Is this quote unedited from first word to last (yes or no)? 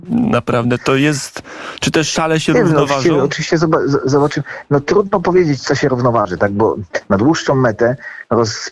yes